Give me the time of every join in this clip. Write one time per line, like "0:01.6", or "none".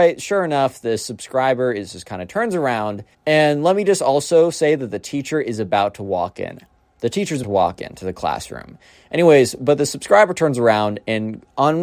0:03.1
0:07.4

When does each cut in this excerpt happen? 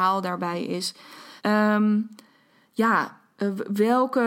0:01.4

